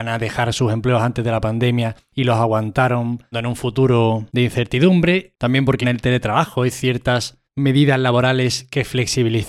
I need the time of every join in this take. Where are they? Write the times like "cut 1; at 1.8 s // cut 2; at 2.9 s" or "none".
cut 1; at 3.3 s // cut 2; at 5.8 s // cut 3; at 7.4 s